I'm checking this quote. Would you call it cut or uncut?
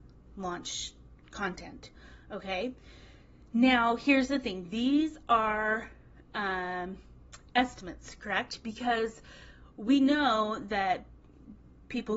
uncut